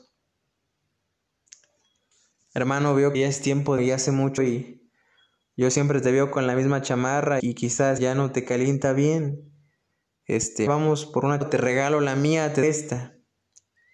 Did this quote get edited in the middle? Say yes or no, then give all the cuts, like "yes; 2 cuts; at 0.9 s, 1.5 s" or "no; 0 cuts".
yes; 8 cuts; at 3.1 s, 3.8 s, 4.4 s, 7.4 s, 8.0 s, 10.7 s, 11.4 s, 12.6 s